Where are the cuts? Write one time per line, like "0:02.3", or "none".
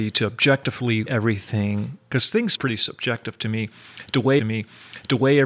0:01.1
0:02.6
0:04.4